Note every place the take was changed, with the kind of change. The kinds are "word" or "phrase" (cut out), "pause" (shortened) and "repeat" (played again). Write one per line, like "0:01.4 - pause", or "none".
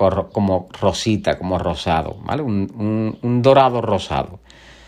none